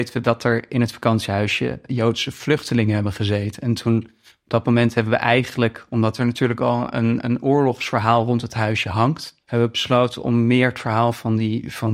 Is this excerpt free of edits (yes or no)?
no